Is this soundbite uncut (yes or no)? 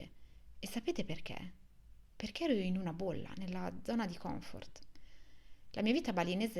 yes